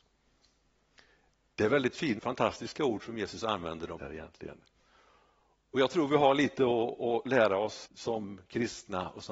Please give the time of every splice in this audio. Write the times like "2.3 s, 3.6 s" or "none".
2.2 s, 4.0 s, 7.9 s